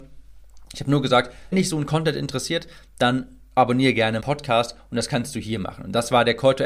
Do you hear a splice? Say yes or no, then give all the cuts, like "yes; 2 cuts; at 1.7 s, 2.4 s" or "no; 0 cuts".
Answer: yes; 2 cuts; at 1.5 s, 4.2 s